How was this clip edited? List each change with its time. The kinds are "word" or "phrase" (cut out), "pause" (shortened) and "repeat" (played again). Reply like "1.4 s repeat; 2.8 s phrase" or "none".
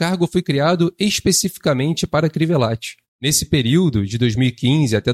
3.0 s pause